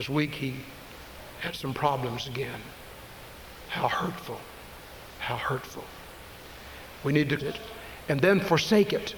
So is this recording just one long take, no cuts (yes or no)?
no